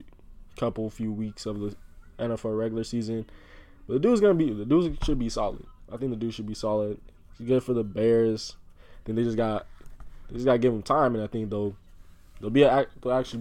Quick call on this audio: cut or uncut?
uncut